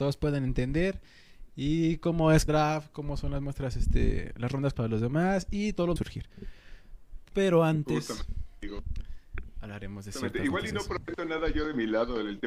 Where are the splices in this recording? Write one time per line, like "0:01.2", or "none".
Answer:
0:02.5
0:04.7
0:06.0

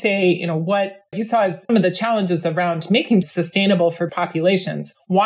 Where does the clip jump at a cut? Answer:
0:01.1
0:01.7
0:03.2
0:04.1

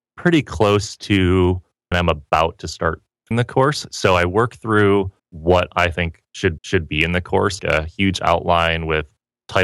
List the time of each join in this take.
0:01.9
0:03.3
0:05.2
0:06.6
0:07.6

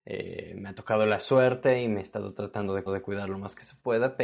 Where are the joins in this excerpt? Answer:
0:02.9

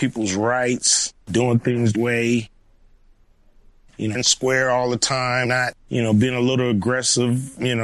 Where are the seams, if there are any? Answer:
0:01.2
0:01.9
0:04.1
0:05.4
0:05.8

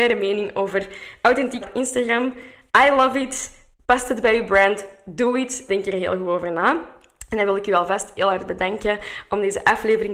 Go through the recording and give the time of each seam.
0:01.6
0:05.7

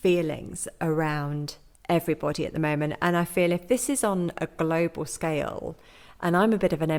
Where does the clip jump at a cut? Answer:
none

